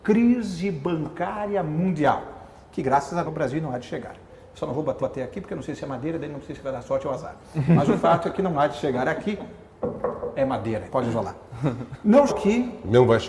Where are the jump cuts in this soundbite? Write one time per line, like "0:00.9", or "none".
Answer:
0:03.2
0:05.0
0:10.9
0:12.3